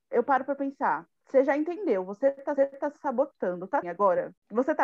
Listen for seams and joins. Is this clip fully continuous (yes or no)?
no